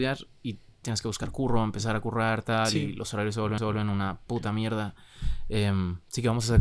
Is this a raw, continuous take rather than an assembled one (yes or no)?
no